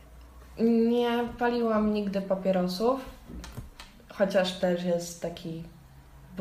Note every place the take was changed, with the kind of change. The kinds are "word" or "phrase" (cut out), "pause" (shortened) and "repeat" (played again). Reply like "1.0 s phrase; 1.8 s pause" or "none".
4.6 s word

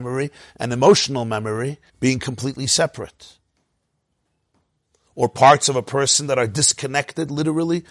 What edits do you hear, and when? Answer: 1.9 s pause

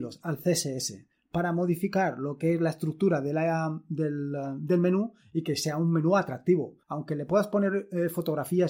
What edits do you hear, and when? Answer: 6.8 s pause

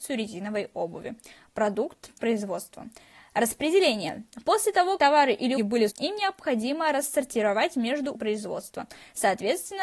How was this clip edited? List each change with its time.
2.2 s word; 5.0 s word; 5.6 s word; 5.9 s word; 8.2 s word

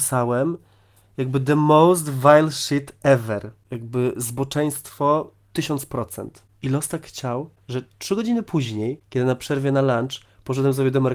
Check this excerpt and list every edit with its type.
none

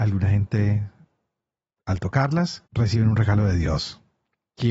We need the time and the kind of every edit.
2.7 s pause

